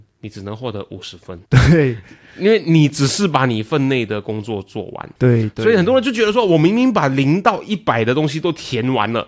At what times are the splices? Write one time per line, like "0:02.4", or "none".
0:01.5
0:05.2